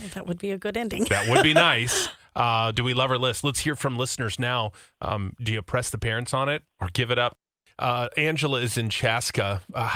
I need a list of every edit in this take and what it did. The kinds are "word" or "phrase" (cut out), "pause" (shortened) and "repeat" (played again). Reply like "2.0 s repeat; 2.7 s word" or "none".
none

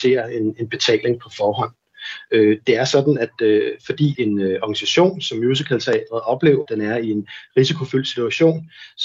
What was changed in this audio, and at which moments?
4.1 s word; 6.7 s word

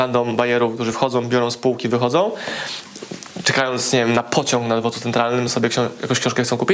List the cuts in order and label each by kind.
none

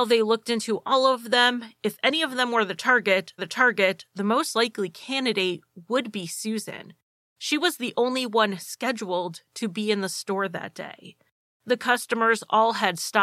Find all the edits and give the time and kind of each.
3.4 s repeat

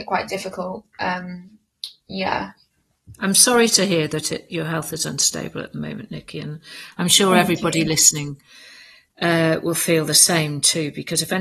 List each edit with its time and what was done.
none

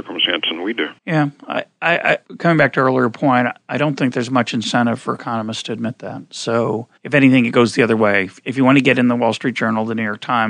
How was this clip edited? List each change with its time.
1.0 s pause; 2.2 s pause; 7.0 s pause

